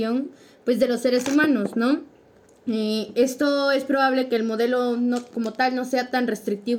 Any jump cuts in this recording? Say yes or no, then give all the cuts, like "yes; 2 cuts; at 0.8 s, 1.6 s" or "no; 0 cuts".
no; 0 cuts